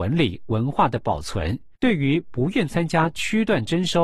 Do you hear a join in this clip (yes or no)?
yes